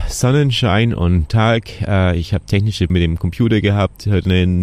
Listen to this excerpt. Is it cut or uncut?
cut